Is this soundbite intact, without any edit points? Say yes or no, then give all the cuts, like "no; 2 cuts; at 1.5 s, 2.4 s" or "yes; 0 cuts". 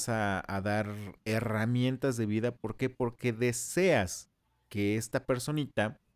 yes; 0 cuts